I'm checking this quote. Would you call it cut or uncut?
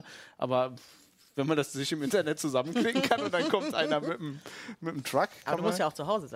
uncut